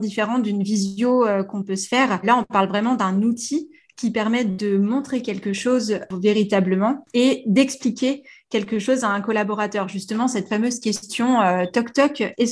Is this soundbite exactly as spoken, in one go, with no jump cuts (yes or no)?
yes